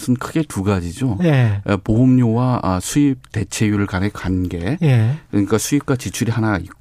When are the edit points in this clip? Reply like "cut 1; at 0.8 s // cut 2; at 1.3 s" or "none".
none